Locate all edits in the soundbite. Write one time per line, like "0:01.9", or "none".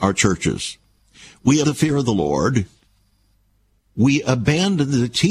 0:01.6